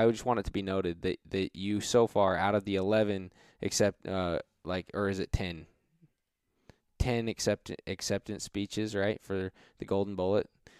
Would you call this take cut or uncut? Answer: uncut